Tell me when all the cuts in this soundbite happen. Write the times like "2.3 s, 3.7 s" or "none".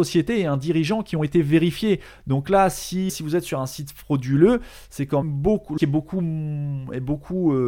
3.1 s, 5.2 s, 5.8 s